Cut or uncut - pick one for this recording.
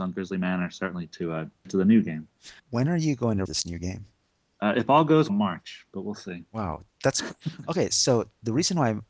cut